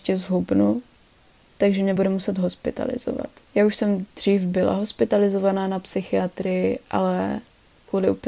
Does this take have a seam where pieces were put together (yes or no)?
no